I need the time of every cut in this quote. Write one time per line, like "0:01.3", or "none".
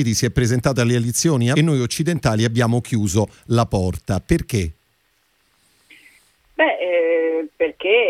0:01.5